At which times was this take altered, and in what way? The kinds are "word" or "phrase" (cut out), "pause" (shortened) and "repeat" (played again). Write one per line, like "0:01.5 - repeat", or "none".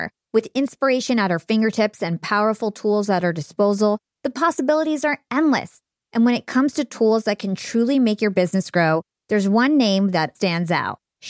0:10.3 - word